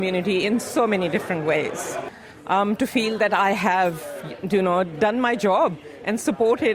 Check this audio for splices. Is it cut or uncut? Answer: uncut